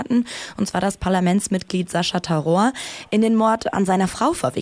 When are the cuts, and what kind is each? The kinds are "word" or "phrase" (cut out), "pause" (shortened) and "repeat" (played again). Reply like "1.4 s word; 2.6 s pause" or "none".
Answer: none